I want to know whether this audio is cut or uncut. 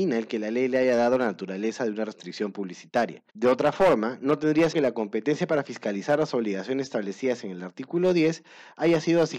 cut